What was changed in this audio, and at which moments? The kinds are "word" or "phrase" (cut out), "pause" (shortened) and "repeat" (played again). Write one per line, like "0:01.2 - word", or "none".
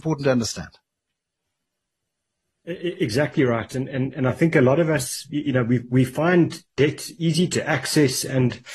none